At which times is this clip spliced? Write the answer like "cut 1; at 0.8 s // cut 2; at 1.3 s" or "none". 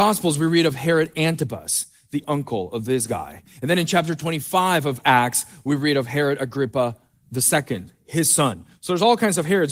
none